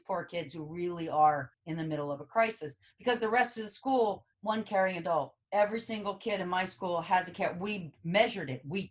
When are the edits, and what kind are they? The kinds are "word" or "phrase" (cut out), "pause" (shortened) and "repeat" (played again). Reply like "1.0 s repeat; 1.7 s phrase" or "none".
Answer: 1.5 s pause; 4.3 s pause; 5.4 s pause